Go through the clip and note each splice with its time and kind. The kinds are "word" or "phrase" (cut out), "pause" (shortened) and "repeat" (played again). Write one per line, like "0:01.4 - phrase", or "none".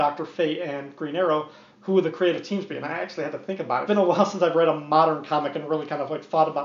0:03.9 - phrase